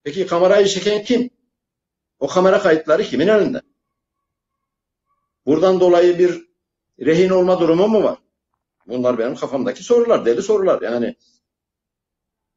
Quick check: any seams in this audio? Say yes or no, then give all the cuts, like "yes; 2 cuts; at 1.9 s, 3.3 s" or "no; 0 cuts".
no; 0 cuts